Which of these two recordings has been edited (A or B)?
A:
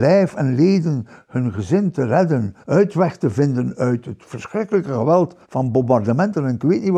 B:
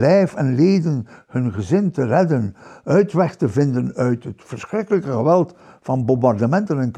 A